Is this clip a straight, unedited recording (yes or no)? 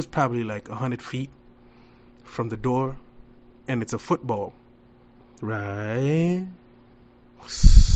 yes